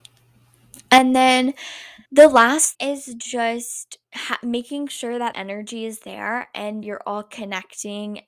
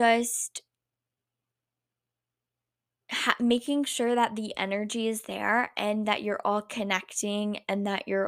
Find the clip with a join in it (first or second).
first